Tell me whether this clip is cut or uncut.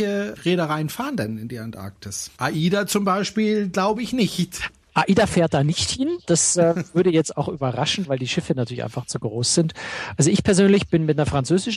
cut